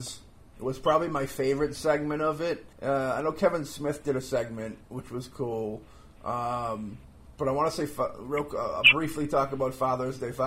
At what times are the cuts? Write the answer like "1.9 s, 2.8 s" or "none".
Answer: 2.7 s